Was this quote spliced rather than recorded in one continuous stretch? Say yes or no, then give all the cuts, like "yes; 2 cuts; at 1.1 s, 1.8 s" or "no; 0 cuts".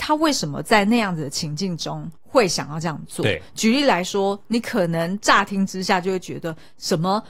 yes; 1 cut; at 2.2 s